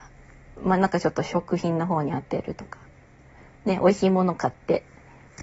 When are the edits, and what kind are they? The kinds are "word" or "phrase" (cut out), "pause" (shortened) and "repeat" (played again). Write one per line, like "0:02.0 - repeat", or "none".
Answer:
none

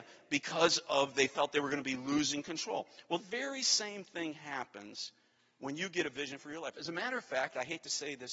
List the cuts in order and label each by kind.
0:03.2 - word

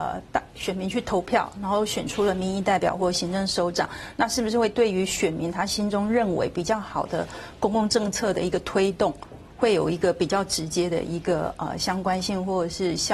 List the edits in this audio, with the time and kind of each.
none

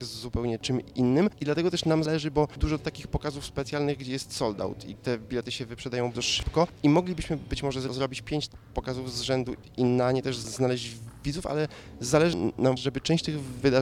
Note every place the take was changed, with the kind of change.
0:02.1 - word
0:02.6 - word
0:04.9 - word
0:06.1 - word
0:08.5 - word
0:12.8 - word

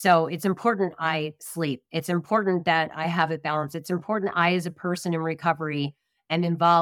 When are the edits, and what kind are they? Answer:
none

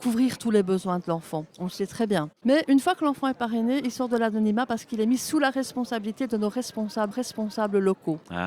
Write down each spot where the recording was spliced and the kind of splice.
0:01.5 - pause
0:02.4 - pause
0:07.1 - repeat

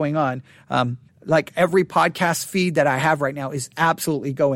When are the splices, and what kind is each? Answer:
0:01.1 - pause

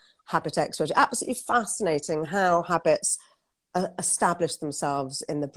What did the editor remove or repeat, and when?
none

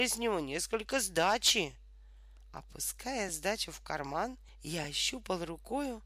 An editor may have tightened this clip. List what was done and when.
none

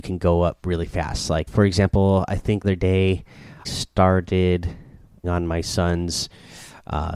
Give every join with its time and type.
0:01.5 - word
0:02.6 - word
0:03.6 - word
0:05.2 - word

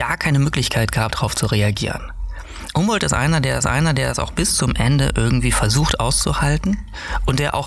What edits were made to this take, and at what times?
0:01.1 - word
0:03.6 - repeat

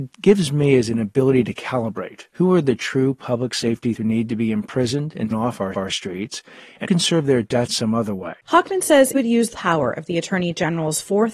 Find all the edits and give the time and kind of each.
0:02.3 - pause
0:04.0 - word
0:05.3 - word
0:05.7 - repeat
0:06.9 - word
0:07.7 - phrase
0:08.4 - pause
0:09.1 - word
0:09.5 - word

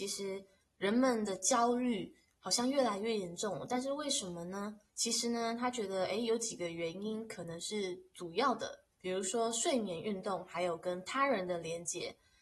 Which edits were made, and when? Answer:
0:04.9 - pause
0:08.9 - pause

